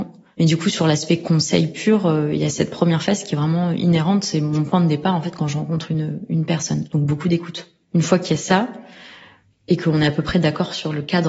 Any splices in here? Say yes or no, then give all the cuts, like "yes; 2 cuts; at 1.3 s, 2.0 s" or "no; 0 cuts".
no; 0 cuts